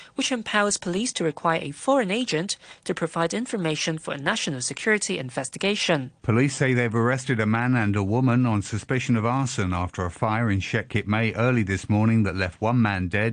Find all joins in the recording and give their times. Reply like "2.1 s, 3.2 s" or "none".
6.2 s